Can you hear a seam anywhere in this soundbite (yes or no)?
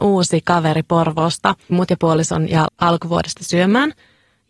yes